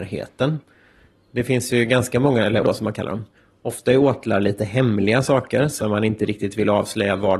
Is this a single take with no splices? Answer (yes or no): no